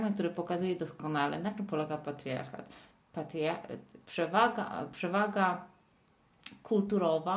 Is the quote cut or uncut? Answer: uncut